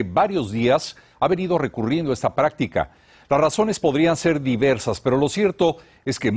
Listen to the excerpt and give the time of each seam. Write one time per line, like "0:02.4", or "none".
none

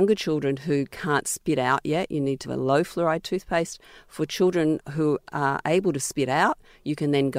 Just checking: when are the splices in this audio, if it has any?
0:02.4

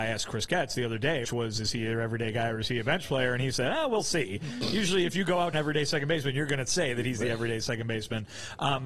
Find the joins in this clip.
0:01.2
0:05.5

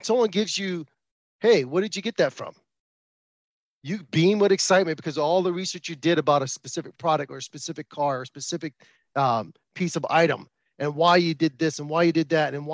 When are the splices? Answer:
none

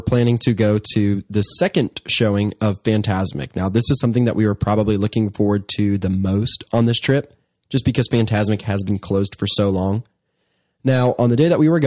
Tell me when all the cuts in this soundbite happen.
none

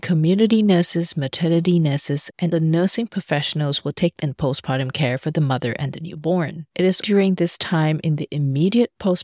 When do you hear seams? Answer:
0:02.5
0:04.2
0:06.7
0:07.0

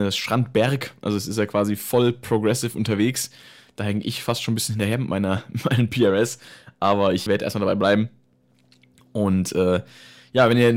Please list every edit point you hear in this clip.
0:07.3

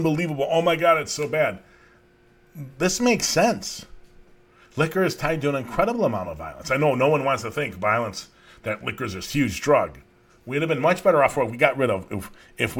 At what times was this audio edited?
none

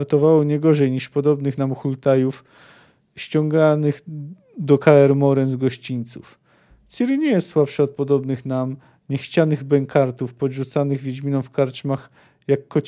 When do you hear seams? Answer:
none

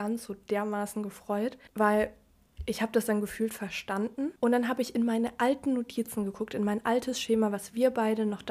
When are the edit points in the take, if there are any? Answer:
0:01.7
0:04.4

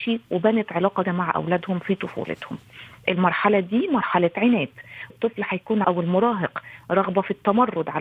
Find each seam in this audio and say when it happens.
0:01.0
0:05.1
0:05.8

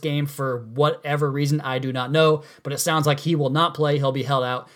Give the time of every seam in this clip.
none

